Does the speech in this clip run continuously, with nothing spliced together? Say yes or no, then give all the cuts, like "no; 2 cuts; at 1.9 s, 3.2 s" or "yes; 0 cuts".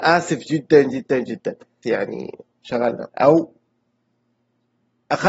no; 2 cuts; at 1.8 s, 3.1 s